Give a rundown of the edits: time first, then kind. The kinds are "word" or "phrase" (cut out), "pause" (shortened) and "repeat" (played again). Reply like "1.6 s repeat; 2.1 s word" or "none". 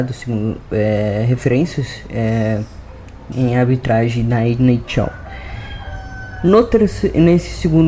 3.3 s word